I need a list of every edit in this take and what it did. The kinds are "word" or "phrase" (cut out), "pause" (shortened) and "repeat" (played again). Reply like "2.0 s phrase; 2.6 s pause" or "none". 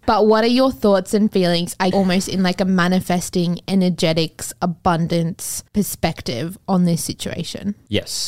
1.9 s word; 5.7 s pause

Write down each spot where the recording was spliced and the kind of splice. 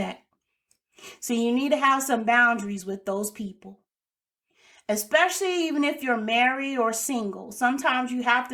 none

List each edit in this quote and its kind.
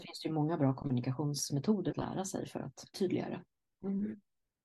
1.9 s word; 2.9 s word

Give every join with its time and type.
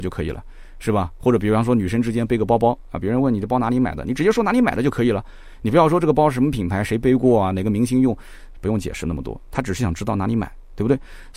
none

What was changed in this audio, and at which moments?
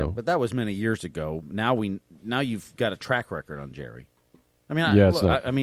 none

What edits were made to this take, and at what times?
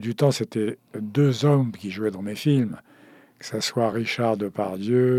none

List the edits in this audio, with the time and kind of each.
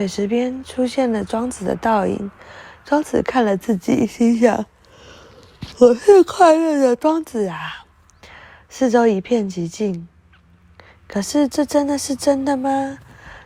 none

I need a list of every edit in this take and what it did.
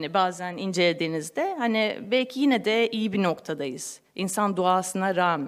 none

